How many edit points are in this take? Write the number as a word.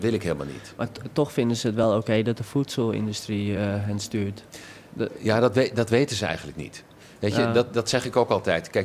zero